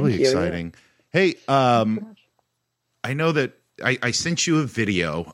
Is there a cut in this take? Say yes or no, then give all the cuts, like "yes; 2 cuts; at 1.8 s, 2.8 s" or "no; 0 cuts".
no; 0 cuts